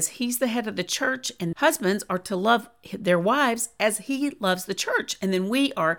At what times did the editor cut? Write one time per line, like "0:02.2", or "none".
0:01.5